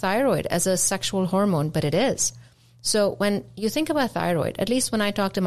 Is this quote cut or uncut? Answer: uncut